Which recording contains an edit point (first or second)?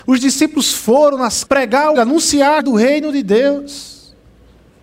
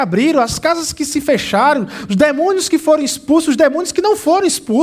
first